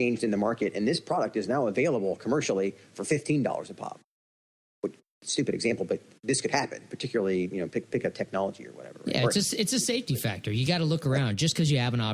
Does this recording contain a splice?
no; 0 cuts

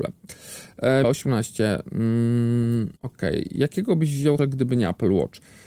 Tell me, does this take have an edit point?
yes; 3 cuts; at 1.0 s, 3.0 s, 4.4 s

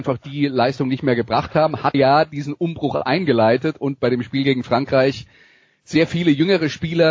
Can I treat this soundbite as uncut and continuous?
no; 1 cut; at 1.9 s

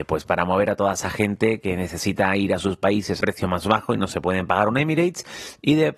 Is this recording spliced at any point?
yes; 1 cut; at 3.2 s

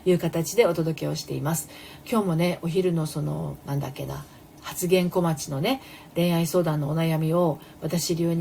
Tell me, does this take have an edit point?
yes; 1 cut; at 3.6 s

